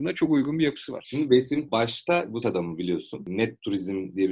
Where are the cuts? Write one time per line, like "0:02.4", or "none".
0:01.7
0:02.4